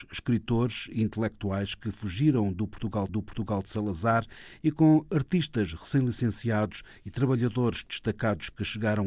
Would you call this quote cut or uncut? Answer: cut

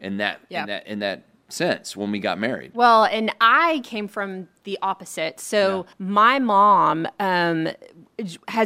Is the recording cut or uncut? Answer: cut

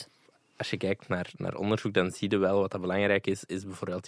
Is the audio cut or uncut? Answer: uncut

